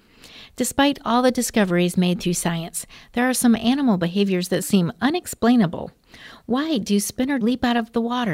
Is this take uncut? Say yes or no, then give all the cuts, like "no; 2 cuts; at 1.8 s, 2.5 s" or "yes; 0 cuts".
no; 2 cuts; at 4.6 s, 7.4 s